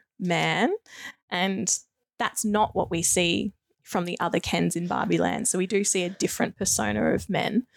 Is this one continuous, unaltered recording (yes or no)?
yes